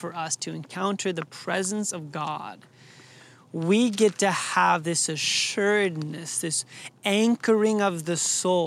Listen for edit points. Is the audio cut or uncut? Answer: uncut